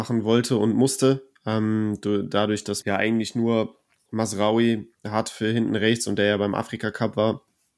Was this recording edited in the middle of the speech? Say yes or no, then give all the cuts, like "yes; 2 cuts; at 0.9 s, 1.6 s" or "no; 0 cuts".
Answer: yes; 1 cut; at 2.8 s